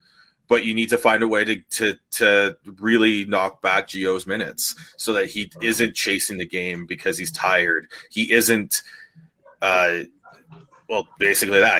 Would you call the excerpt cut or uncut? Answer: uncut